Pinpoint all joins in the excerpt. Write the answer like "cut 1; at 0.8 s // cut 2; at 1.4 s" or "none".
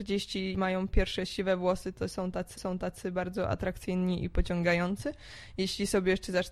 cut 1; at 2.6 s